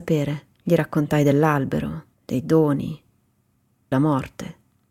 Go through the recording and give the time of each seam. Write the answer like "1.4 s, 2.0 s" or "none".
2.1 s, 3.9 s